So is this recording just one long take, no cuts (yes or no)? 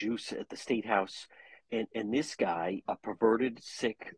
no